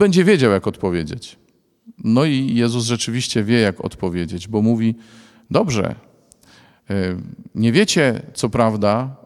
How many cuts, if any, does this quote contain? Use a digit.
0